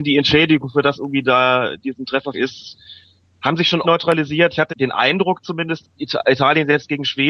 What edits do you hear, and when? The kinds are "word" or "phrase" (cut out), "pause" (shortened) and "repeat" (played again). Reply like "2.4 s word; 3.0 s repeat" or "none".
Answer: 0.9 s word; 1.8 s word; 2.3 s word; 3.8 s word; 4.7 s word; 5.8 s word